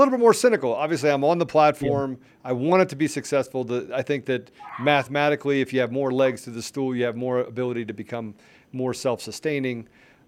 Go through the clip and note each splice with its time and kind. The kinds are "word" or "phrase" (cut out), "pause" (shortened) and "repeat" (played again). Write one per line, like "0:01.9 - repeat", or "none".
none